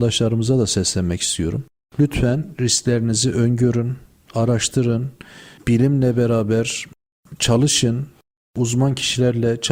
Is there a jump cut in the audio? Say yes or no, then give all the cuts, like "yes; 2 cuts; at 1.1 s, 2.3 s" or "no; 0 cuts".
no; 0 cuts